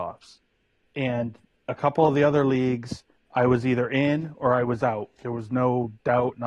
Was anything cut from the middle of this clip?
no; 0 cuts

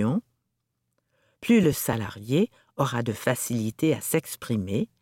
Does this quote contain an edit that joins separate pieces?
no; 0 cuts

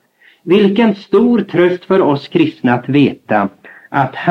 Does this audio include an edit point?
no; 0 cuts

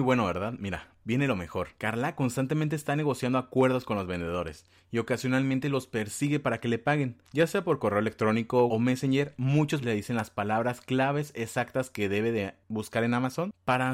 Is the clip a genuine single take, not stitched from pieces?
no; 3 cuts; at 1.8 s, 8.7 s, 9.8 s

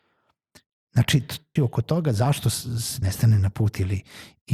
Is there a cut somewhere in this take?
yes; 2 cuts; at 1.6 s, 3.0 s

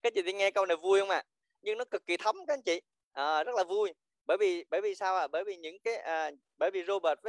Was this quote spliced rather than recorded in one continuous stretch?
no; 0 cuts

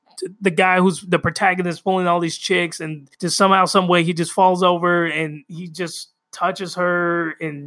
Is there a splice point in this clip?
yes; 1 cut; at 3.1 s

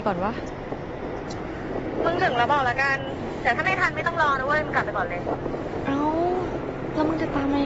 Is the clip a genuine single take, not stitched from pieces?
yes; 0 cuts

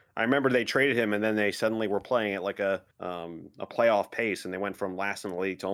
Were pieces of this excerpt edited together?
yes; 1 cut; at 2.9 s

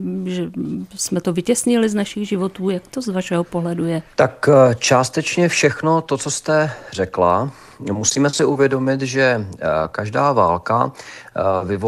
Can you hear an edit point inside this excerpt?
yes; 1 cut; at 4.1 s

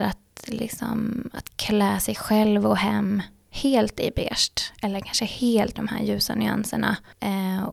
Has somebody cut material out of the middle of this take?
yes; 1 cut; at 5.8 s

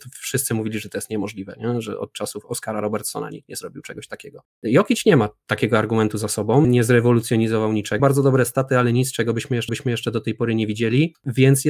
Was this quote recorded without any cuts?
no; 3 cuts; at 6.6 s, 8.0 s, 9.7 s

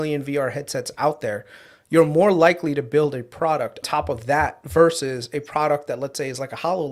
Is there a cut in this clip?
yes; 1 cut; at 3.8 s

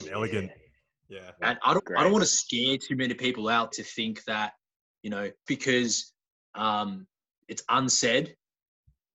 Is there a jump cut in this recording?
yes; 3 cuts; at 1.8 s, 3.7 s, 5.5 s

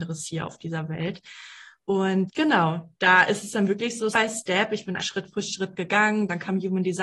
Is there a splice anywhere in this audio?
yes; 3 cuts; at 2.3 s, 4.1 s, 5.0 s

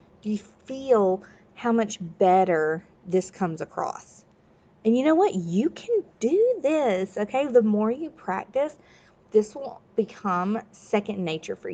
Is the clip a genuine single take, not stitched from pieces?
yes; 0 cuts

